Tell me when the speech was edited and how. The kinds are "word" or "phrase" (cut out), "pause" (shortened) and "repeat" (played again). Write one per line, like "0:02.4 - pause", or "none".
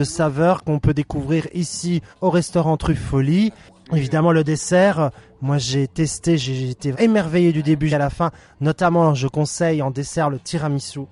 0:02.1 - pause
0:06.9 - word
0:07.9 - word